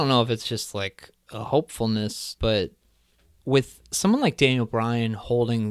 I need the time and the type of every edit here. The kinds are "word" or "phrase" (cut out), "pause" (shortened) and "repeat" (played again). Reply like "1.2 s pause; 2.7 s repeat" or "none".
2.4 s phrase